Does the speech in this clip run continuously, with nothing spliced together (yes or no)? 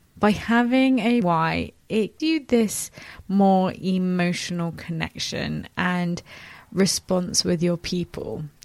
no